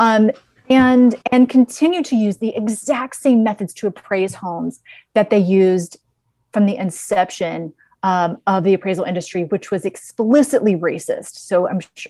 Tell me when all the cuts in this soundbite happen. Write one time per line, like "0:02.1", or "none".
0:01.2